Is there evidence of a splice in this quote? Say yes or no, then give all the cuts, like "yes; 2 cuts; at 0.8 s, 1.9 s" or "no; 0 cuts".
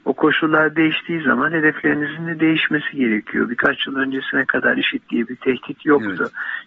no; 0 cuts